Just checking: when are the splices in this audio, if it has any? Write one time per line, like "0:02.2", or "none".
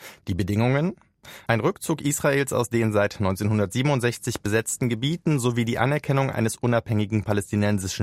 none